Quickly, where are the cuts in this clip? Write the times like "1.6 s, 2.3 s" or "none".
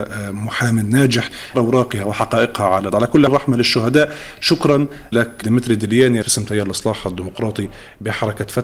1.5 s, 2.9 s, 3.3 s, 5.1 s, 5.4 s, 6.2 s

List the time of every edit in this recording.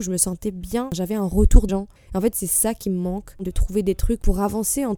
1.7 s, 3.4 s

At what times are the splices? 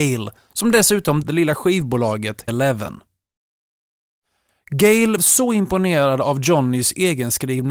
1.2 s, 2.5 s, 5.2 s

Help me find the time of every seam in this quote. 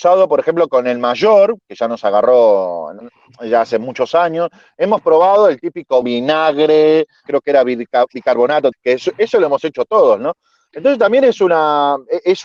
3.0 s, 6.0 s, 7.3 s, 8.7 s

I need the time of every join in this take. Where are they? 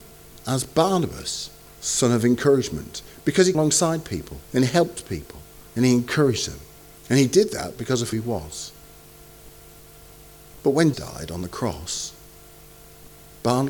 1.7 s, 3.5 s, 4.4 s, 5.7 s, 6.9 s, 8.1 s, 10.9 s

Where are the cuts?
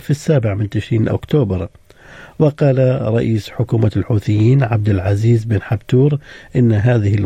1.1 s

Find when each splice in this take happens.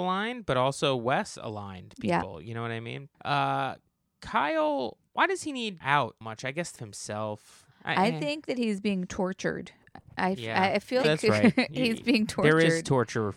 1.3 s, 3.1 s, 5.1 s, 5.8 s, 6.2 s, 6.8 s, 7.7 s, 11.0 s

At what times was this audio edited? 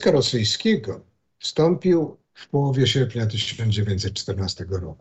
none

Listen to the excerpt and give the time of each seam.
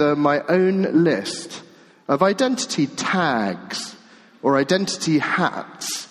none

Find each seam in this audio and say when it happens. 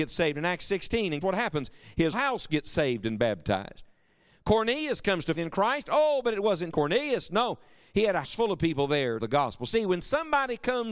1.2 s, 2.1 s, 5.3 s, 6.7 s, 8.2 s, 9.2 s

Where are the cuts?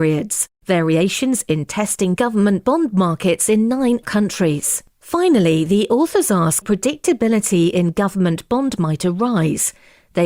2.2 s, 4.0 s, 4.9 s, 6.6 s, 8.8 s

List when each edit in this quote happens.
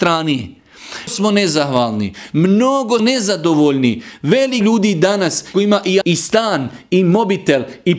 1.1 s, 3.0 s, 4.6 s, 5.5 s, 6.0 s

